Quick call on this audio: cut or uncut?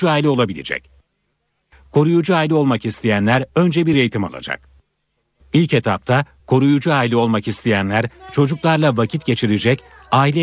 uncut